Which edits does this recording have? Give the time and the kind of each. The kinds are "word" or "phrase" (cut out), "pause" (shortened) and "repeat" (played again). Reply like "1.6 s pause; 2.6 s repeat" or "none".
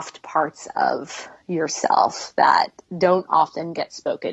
none